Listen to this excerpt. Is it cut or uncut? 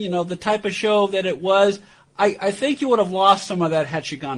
uncut